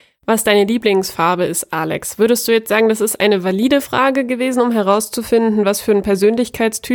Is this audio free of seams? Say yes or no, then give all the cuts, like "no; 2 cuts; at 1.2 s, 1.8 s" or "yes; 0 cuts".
yes; 0 cuts